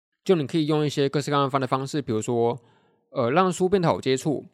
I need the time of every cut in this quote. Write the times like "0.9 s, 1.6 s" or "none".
none